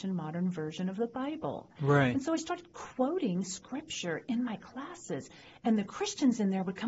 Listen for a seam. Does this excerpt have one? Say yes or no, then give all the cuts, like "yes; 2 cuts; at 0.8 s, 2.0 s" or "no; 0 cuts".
no; 0 cuts